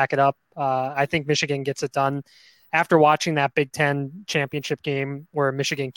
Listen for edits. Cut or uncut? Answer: uncut